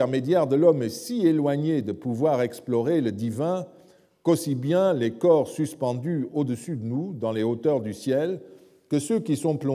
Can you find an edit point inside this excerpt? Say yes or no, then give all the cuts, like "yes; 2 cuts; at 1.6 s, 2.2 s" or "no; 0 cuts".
no; 0 cuts